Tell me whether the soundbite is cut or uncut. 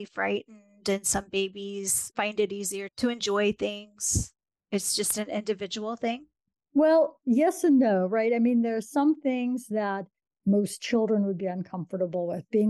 uncut